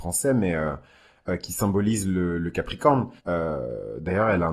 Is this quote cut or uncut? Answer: cut